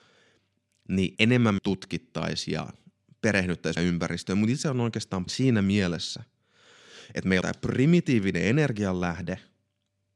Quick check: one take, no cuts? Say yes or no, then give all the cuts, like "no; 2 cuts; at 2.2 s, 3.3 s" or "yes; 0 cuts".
no; 6 cuts; at 1.2 s, 1.6 s, 3.8 s, 4.6 s, 5.3 s, 7.4 s